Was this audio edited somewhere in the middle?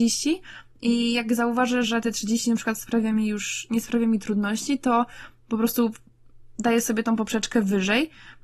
no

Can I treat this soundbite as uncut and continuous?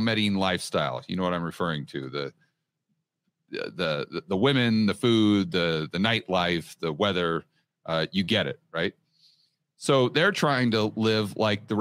yes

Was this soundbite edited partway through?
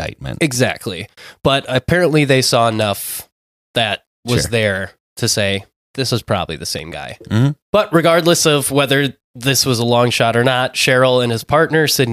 yes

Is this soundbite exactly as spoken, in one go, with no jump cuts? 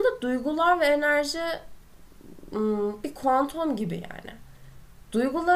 yes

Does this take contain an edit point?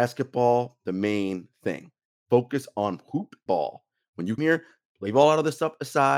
yes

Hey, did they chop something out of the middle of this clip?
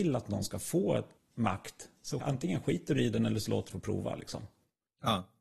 yes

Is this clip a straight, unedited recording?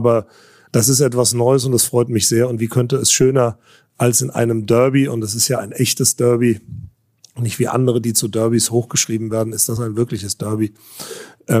yes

